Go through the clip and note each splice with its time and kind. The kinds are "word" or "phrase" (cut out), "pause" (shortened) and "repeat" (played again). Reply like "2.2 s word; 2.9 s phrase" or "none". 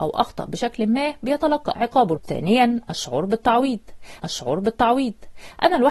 1.7 s word; 2.2 s word; 4.2 s repeat